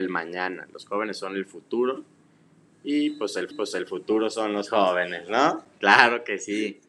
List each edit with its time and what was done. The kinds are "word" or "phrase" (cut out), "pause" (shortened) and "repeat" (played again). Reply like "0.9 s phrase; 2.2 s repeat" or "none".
3.5 s repeat